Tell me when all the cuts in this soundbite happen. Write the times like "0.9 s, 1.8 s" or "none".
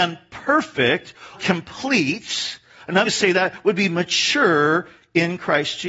1.3 s, 3.0 s